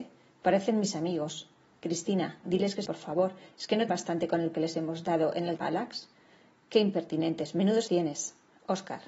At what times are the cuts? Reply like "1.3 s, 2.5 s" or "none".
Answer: 2.4 s, 2.8 s, 3.9 s, 4.5 s, 5.6 s, 7.9 s